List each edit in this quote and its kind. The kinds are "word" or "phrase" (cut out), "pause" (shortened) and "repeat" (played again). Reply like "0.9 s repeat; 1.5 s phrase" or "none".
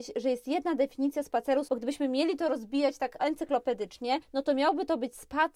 1.7 s word; 3.2 s word